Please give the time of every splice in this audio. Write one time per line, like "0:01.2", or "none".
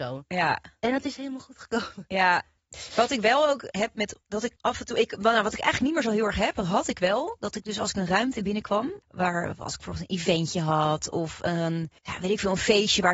0:03.7
0:04.2
0:04.6
0:09.0
0:12.0